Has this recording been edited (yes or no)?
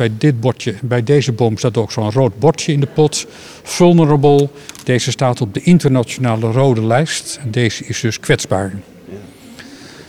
no